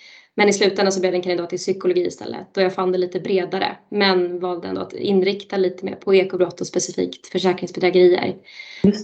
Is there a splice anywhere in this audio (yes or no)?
no